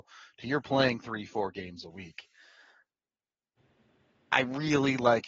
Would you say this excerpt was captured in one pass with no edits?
yes; 0 cuts

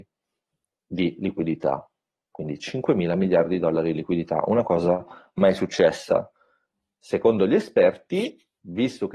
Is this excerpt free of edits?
yes; 0 cuts

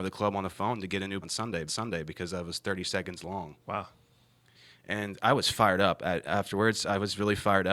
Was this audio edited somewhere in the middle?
yes; 3 cuts; at 1.2 s, 1.7 s, 3.6 s

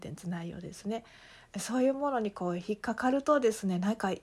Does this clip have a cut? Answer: no; 0 cuts

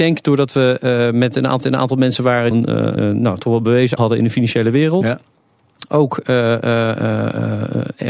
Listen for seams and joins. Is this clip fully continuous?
no; 4 cuts; at 1.6 s, 2.5 s, 3.0 s, 4.0 s

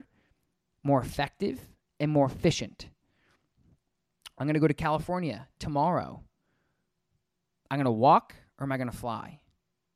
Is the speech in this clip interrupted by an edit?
no; 0 cuts

